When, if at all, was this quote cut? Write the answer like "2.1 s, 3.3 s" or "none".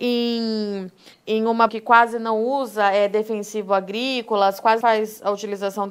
1.1 s, 1.7 s, 4.8 s